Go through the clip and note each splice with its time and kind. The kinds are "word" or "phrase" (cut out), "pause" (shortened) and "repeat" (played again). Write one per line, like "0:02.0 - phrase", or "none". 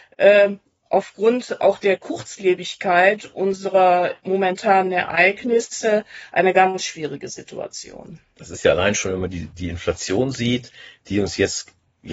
none